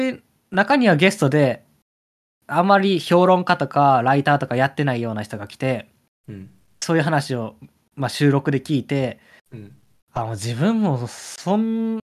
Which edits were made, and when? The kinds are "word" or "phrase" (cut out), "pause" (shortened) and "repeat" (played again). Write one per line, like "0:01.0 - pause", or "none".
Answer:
none